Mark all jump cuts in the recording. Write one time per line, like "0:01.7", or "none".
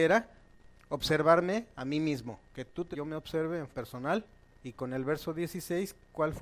0:02.5
0:02.9
0:03.7
0:04.3